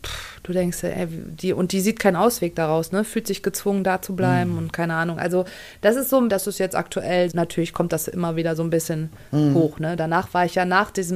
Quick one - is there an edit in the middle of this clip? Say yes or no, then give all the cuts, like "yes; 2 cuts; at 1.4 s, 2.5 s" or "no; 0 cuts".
yes; 2 cuts; at 6.3 s, 7.3 s